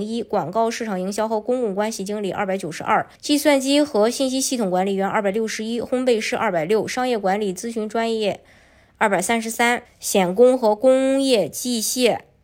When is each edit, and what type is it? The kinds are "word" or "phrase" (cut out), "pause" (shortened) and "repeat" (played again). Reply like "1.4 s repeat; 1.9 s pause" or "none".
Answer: 3.2 s pause; 9.9 s phrase